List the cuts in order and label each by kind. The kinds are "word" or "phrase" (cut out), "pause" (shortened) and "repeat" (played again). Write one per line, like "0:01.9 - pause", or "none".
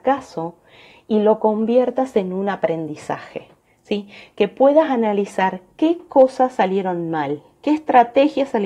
none